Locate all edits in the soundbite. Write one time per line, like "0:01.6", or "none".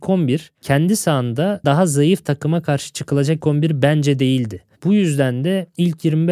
0:01.6
0:03.4